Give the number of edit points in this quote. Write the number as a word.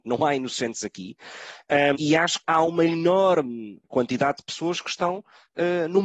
three